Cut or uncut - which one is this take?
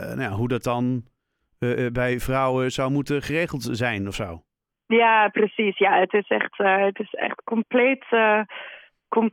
cut